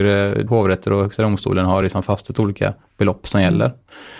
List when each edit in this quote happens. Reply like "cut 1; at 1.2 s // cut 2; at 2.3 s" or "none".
none